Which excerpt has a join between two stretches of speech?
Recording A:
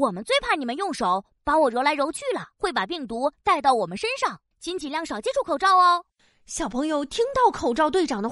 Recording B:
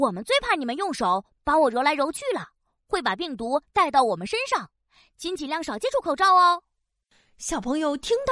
A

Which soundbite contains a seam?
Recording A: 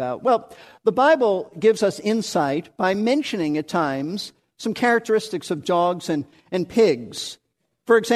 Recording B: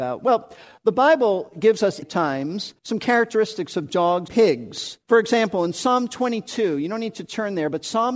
B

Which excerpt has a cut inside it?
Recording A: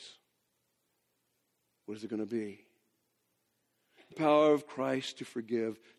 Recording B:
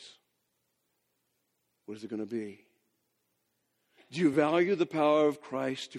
A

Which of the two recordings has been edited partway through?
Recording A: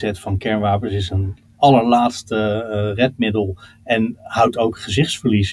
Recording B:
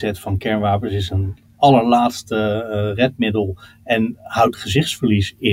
B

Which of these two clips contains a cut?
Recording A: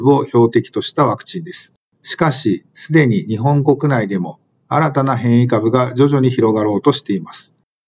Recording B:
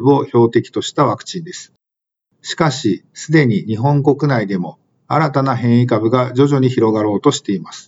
A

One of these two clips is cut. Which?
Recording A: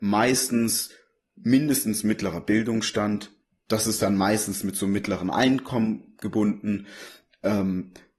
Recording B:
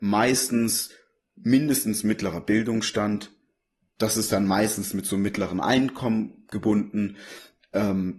A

